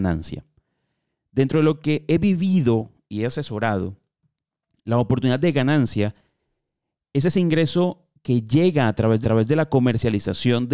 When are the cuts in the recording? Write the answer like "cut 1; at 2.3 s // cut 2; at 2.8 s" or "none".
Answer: cut 1; at 9.2 s